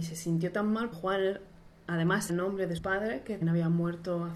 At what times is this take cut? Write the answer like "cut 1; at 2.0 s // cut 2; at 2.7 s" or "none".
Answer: cut 1; at 0.9 s // cut 2; at 2.3 s // cut 3; at 2.8 s // cut 4; at 3.4 s